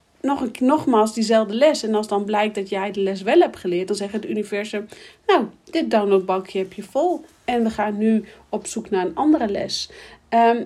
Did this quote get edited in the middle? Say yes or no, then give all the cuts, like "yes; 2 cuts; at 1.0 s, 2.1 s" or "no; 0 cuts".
no; 0 cuts